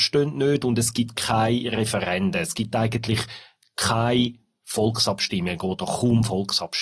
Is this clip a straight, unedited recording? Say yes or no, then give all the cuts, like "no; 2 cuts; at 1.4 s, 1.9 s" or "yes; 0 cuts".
yes; 0 cuts